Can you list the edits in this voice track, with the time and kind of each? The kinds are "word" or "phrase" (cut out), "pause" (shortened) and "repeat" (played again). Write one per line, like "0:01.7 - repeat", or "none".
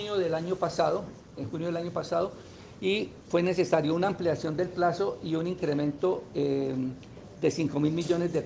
none